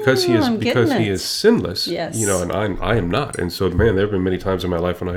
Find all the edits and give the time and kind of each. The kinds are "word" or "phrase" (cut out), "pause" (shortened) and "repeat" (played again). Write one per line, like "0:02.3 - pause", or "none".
none